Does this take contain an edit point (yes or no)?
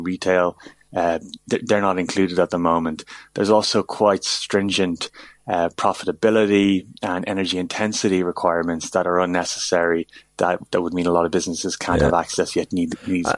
no